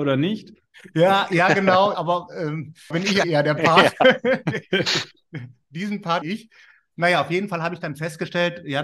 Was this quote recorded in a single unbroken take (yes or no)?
no